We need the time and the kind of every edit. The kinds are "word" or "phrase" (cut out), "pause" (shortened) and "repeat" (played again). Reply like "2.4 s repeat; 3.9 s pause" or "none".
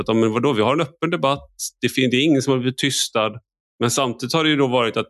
none